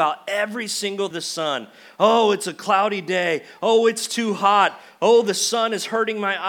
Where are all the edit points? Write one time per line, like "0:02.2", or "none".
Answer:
0:01.1